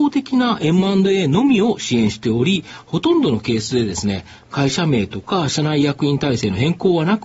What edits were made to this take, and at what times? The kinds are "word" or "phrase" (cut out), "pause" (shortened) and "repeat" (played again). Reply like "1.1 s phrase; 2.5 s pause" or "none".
none